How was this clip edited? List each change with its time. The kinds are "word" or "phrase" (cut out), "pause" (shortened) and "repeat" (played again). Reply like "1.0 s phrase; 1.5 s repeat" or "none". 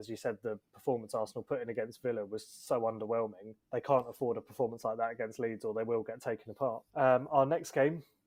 3.6 s pause; 6.9 s pause